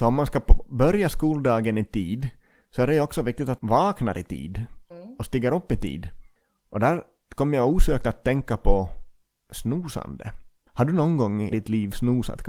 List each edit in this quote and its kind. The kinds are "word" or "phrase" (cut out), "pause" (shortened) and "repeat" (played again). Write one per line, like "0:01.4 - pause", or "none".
0:03.6 - word
0:04.9 - word
0:11.5 - word